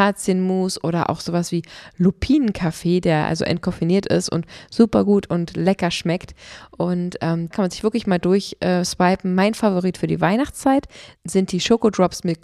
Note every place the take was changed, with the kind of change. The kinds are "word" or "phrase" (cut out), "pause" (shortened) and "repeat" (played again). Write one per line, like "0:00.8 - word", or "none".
0:07.5 - word

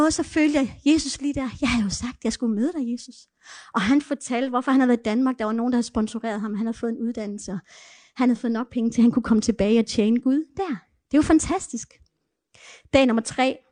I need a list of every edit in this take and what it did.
none

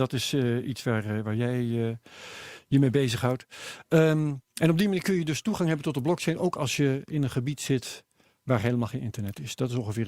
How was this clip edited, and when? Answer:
none

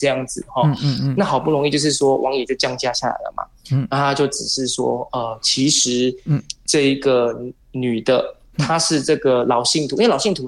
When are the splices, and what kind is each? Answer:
0:07.6 - pause

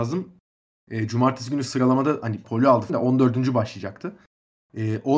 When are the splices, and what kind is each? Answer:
0:02.4 - word
0:02.9 - word

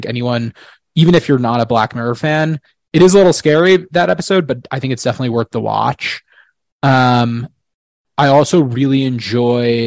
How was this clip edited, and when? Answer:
none

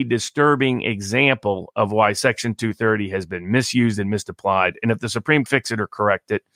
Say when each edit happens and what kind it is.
0:05.5 - phrase

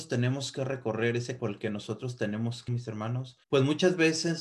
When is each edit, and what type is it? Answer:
0:01.4 - word
0:02.7 - word
0:03.4 - pause

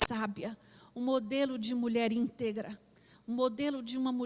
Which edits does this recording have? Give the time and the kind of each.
none

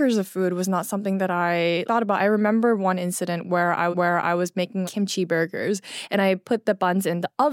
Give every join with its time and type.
0:01.9 - word
0:03.9 - repeat
0:04.8 - word

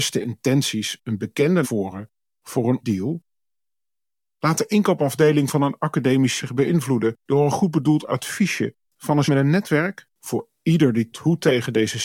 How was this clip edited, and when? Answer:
0:01.6 - word
0:02.8 - word
0:06.4 - word
0:08.8 - pause
0:09.3 - word
0:10.1 - pause
0:11.1 - word

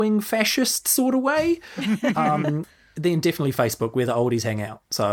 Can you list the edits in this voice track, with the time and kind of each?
0:02.7 - pause

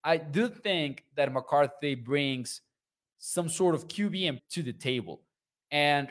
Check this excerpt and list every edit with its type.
0:04.4 - word

